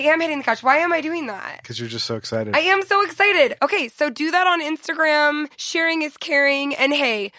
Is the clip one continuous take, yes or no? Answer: no